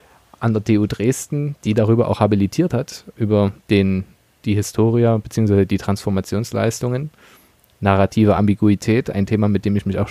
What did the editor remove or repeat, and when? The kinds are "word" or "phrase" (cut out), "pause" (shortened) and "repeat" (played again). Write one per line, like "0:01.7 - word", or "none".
none